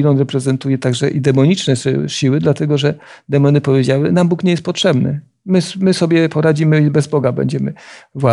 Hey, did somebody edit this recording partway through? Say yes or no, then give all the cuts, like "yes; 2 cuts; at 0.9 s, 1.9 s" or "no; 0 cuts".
no; 0 cuts